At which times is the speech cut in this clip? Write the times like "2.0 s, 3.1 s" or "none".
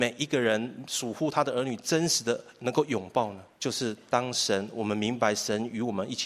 3.5 s